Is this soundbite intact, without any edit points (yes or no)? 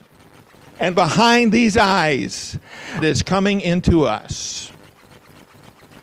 no